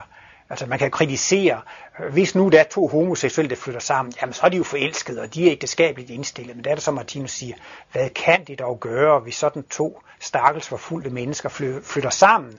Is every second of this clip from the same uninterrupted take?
yes; 0 cuts

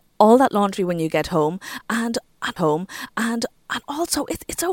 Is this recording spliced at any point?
yes; 1 cut; at 2.6 s

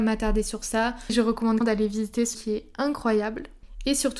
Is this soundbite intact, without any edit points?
no; 2 cuts; at 1.6 s, 2.3 s

